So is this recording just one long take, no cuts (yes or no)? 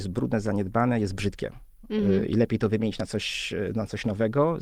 yes